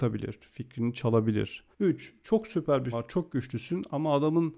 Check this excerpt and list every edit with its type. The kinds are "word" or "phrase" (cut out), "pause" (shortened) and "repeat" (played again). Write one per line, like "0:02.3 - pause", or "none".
0:01.7 - pause
0:02.9 - word

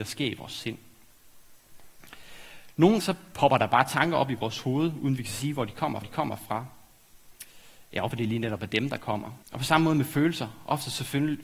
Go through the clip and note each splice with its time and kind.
0:03.0 - word
0:06.0 - repeat
0:08.1 - word
0:09.4 - pause

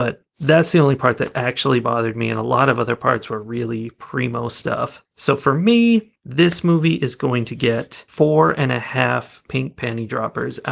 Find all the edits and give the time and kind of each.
0:08.1 - pause

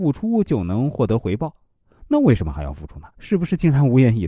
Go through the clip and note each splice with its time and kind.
0:03.1 - pause

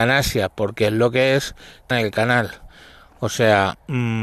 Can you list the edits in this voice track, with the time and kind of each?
0:01.9 - word

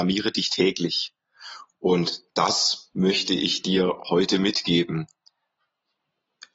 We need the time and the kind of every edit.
none

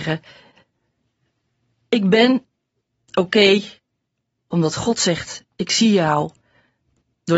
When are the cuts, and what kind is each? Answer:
none

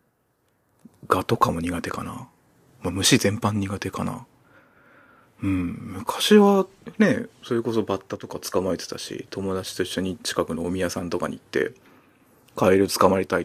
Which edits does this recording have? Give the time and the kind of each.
none

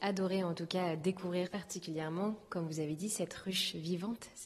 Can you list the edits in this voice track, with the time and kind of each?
0:01.5 - phrase

